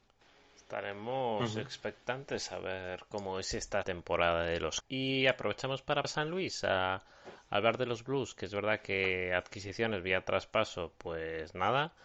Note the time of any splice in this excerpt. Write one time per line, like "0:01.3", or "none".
0:03.8
0:04.8
0:06.0

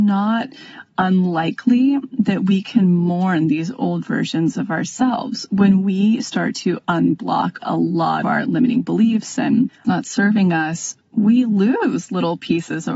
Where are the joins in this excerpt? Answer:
0:07.6
0:08.2
0:09.8

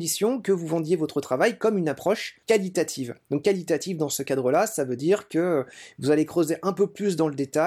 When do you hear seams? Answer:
0:02.4

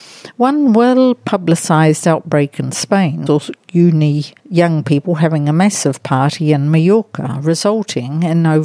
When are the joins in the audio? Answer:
0:03.3
0:04.4

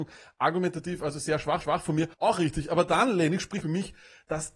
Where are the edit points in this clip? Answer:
0:01.6
0:02.1
0:03.6

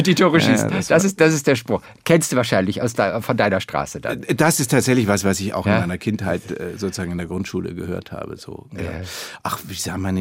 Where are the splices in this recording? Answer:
none

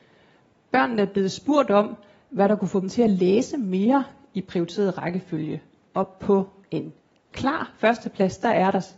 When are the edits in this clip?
none

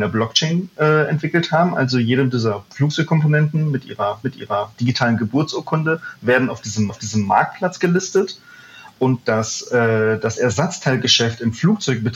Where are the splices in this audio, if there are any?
0:04.2
0:06.9

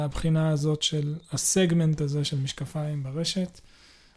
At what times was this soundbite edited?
none

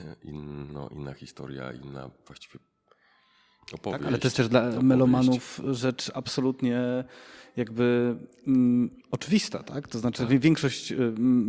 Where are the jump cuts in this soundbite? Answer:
none

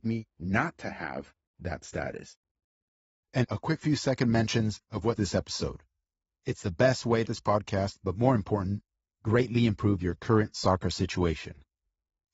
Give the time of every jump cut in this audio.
0:03.4
0:05.2
0:07.2

